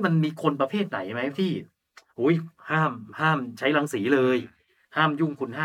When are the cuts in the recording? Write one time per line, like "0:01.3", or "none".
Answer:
none